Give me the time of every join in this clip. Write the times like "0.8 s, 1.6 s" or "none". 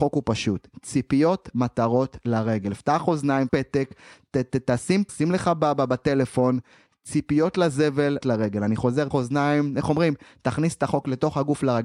1.5 s, 3.5 s, 5.1 s, 8.2 s, 9.1 s